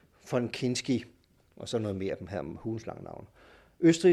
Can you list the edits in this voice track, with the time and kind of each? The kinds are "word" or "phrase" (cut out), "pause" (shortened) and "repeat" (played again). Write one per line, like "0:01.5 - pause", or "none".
none